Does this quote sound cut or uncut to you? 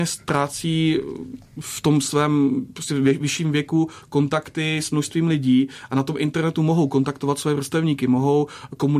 uncut